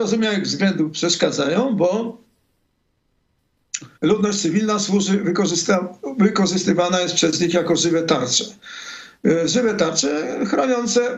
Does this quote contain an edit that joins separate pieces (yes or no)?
yes